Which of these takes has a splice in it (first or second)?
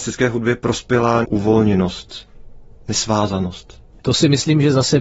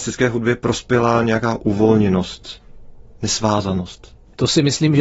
first